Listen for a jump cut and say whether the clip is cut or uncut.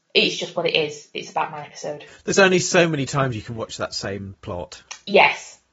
uncut